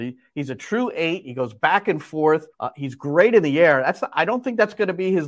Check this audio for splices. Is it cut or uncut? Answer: cut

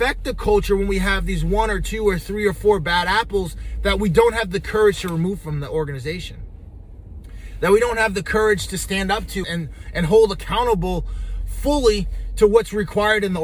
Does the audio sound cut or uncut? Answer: cut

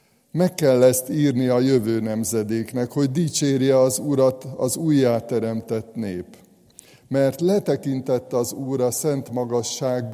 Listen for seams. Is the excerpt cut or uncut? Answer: uncut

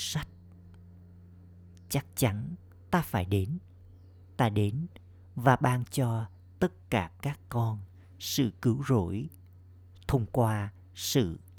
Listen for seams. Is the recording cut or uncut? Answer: uncut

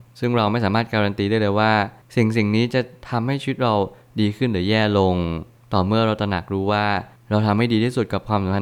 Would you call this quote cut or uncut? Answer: uncut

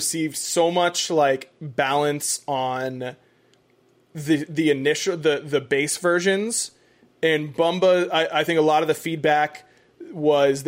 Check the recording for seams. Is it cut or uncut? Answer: uncut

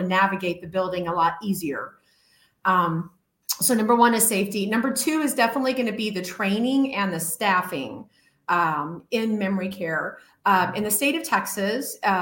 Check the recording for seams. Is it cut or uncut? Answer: uncut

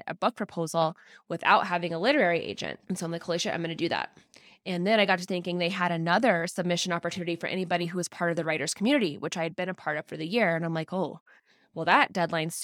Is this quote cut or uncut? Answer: uncut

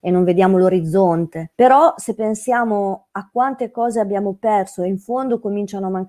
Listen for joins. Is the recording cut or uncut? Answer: cut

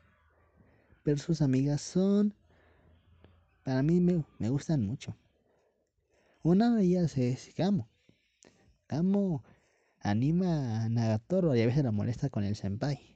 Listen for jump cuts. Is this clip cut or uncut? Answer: uncut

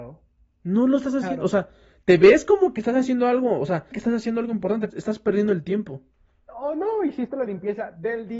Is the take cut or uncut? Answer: cut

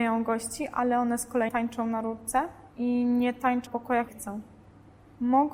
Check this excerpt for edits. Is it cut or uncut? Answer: cut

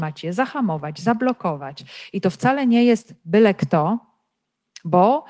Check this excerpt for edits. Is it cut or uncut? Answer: uncut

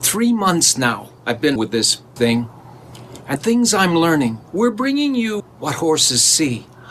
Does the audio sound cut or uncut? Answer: cut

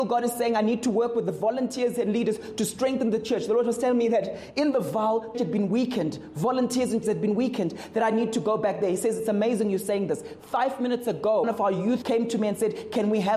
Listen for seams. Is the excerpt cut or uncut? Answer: cut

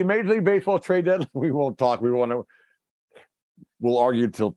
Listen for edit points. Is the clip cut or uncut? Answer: uncut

